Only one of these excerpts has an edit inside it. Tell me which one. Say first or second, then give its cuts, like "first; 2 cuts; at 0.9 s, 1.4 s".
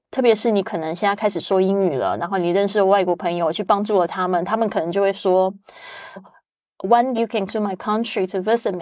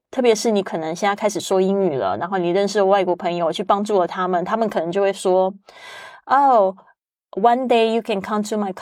first; 3 cuts; at 6.2 s, 7.1 s, 7.5 s